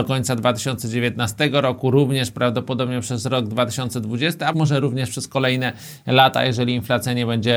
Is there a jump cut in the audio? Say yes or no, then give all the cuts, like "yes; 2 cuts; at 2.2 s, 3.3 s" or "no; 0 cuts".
yes; 1 cut; at 4.5 s